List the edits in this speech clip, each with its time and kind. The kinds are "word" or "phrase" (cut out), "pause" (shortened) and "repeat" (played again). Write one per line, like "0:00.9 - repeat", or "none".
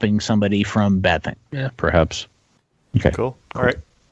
0:01.0 - phrase
0:01.5 - pause